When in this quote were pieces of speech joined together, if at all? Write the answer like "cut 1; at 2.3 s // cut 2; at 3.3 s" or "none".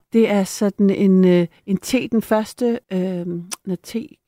cut 1; at 1.6 s // cut 2; at 2.8 s